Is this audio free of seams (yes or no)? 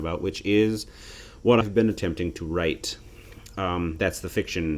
no